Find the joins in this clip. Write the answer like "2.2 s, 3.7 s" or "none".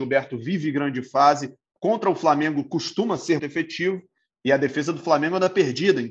3.4 s